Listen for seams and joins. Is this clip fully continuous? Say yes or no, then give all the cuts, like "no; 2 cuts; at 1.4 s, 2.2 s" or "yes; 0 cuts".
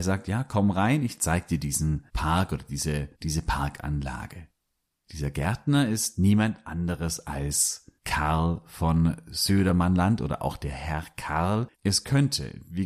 no; 5 cuts; at 2.1 s, 3.1 s, 4.8 s, 8.0 s, 11.7 s